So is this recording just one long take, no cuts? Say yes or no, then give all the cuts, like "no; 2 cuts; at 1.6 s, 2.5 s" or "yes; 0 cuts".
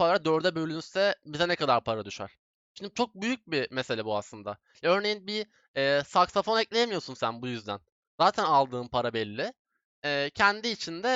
yes; 0 cuts